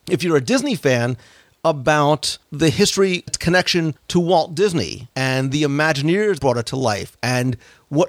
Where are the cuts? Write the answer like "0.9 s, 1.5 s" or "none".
2.4 s, 3.3 s, 4.0 s, 5.1 s, 6.4 s